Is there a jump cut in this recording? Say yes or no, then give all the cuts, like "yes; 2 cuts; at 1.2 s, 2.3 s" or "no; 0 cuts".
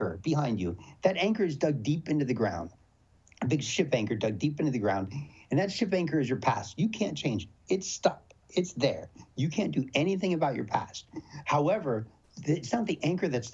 no; 0 cuts